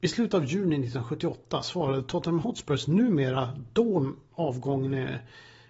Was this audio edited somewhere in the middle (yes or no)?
no